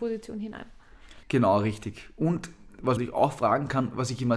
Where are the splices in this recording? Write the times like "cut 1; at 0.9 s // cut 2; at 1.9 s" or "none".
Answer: cut 1; at 1.2 s // cut 2; at 3.0 s